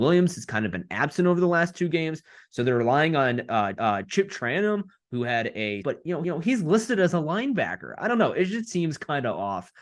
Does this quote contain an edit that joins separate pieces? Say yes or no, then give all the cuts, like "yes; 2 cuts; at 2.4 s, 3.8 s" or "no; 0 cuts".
yes; 3 cuts; at 3.8 s, 5.8 s, 6.2 s